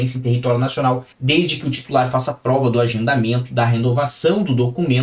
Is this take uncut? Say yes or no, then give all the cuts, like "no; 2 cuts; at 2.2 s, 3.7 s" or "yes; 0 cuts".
no; 1 cut; at 1.1 s